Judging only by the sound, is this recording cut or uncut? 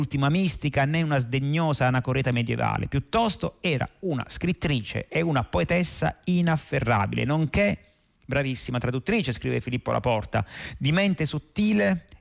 uncut